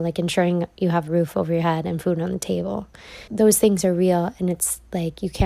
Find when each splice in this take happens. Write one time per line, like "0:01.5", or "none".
0:03.3